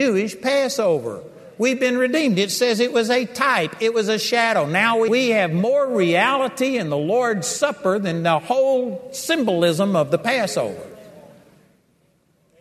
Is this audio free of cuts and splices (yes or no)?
no